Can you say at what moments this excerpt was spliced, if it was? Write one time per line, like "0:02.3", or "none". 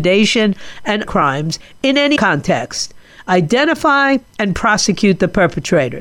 0:01.0
0:02.2
0:04.4